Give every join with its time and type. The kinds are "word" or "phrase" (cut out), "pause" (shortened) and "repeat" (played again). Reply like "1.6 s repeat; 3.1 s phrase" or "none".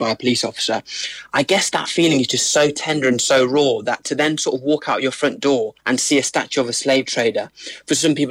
5.8 s pause